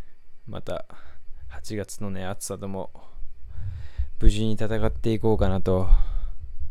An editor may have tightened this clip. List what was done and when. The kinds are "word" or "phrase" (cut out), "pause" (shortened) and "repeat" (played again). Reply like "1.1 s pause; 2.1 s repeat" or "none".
none